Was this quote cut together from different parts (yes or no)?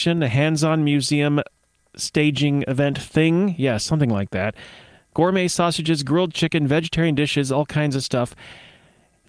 no